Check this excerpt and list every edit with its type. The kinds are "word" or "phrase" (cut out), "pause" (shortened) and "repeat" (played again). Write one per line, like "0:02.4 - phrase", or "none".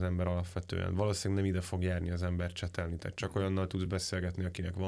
none

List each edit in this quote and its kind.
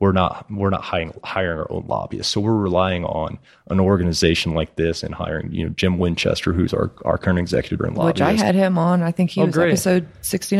0:07.8 - word

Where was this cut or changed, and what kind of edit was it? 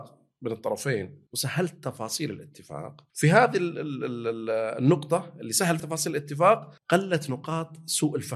0:01.3 - pause
0:03.1 - pause
0:05.8 - word
0:06.8 - pause

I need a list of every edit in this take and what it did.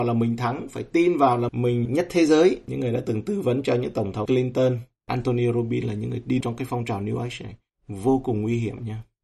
0:01.5 - word
0:01.9 - word
0:04.3 - word
0:06.4 - word

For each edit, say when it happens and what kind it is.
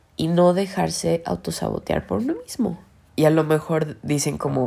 0:03.0 - pause

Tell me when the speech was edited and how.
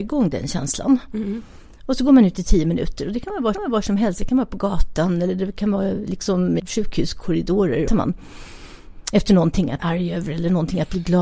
0:03.5 - repeat
0:06.6 - word
0:07.9 - phrase
0:09.8 - word

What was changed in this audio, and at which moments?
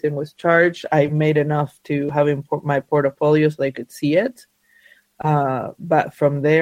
none

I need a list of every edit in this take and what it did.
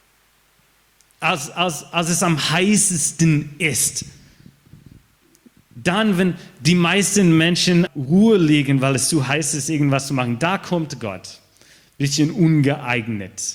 0:07.9 - word

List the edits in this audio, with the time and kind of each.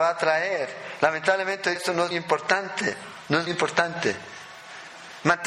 0:01.8 - word
0:02.1 - word
0:03.5 - word

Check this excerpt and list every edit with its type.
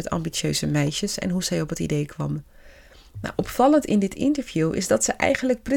none

